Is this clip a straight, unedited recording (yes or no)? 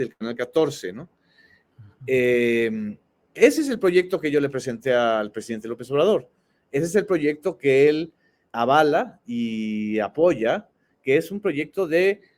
no